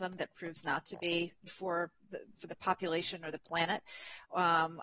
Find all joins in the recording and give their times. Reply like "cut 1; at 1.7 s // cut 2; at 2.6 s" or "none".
cut 1; at 1.5 s